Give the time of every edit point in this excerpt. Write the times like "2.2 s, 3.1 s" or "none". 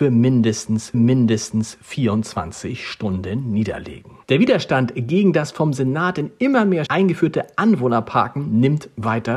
0.9 s, 4.2 s, 6.9 s